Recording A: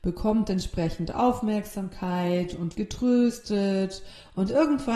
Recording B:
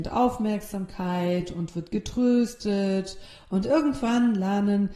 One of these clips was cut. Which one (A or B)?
A